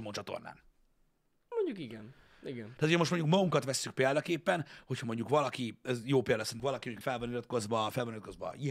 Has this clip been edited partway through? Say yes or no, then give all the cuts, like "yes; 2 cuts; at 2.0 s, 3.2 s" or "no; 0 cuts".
yes; 3 cuts; at 1.5 s, 6.6 s, 7.0 s